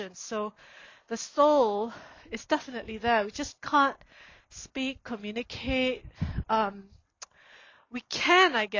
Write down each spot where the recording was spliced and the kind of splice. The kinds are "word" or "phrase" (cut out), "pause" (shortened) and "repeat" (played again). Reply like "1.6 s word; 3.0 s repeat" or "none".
none